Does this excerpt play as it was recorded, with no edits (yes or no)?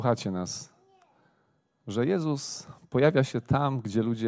yes